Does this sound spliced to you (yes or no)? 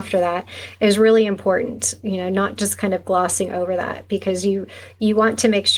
no